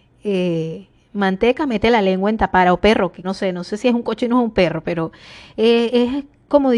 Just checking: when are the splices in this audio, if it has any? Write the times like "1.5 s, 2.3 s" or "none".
3.2 s